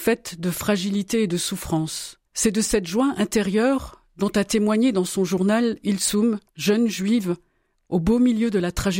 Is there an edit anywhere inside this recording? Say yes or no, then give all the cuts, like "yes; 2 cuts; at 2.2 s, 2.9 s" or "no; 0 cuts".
yes; 3 cuts; at 2.3 s, 5.8 s, 6.5 s